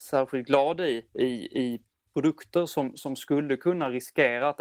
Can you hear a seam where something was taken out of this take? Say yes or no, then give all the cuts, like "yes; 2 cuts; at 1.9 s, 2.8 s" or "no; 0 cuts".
yes; 2 cuts; at 1.1 s, 1.9 s